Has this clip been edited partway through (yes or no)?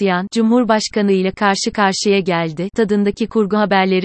no